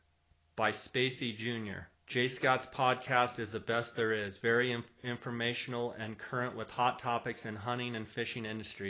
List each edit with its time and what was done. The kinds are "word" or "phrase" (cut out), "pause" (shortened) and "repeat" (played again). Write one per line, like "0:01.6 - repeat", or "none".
0:01.9 - pause